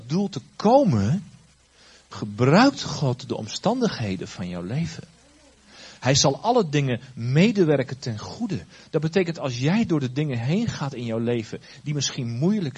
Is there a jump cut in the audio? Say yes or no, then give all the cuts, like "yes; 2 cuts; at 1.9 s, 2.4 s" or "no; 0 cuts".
no; 0 cuts